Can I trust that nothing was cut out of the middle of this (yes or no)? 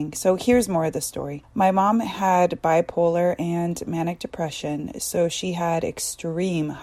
yes